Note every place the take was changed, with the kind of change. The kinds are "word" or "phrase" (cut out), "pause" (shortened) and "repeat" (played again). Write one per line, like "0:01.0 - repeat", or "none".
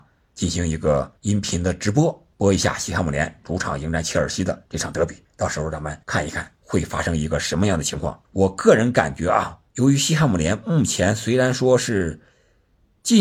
0:01.2 - pause
0:02.3 - pause
0:04.6 - pause
0:05.2 - pause
0:06.0 - pause
0:06.5 - pause
0:08.2 - pause
0:09.7 - pause